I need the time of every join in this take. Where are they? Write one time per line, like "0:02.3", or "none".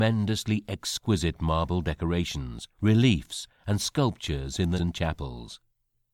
0:02.7
0:04.8